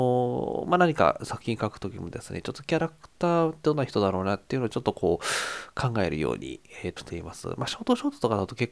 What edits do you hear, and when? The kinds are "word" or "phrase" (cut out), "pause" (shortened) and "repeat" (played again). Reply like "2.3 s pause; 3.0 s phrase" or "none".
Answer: 7.0 s word